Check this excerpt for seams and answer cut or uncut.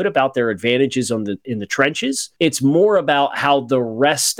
cut